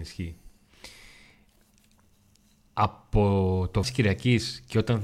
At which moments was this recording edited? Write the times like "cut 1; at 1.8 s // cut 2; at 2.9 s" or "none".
cut 1; at 3.8 s